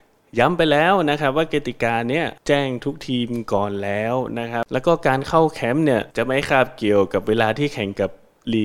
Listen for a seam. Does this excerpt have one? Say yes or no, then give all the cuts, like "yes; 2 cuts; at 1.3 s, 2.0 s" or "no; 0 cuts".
yes; 2 cuts; at 2.4 s, 6.1 s